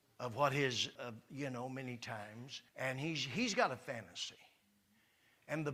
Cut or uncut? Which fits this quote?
cut